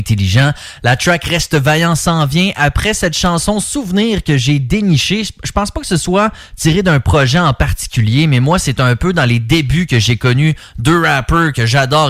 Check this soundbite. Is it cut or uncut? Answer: uncut